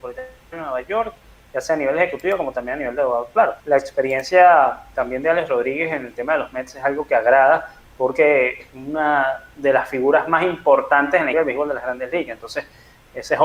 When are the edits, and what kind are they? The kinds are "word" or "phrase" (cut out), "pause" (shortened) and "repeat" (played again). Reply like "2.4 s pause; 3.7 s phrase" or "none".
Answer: 3.6 s pause; 8.6 s word; 11.3 s word